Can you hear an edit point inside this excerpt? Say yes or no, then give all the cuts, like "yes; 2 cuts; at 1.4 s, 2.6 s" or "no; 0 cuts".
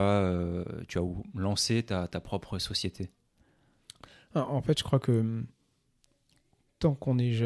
no; 0 cuts